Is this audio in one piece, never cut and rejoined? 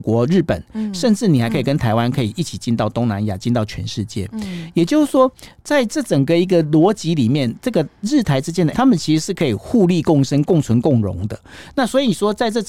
no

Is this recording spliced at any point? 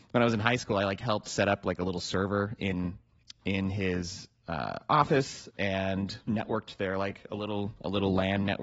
no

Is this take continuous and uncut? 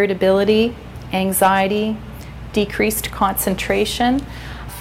yes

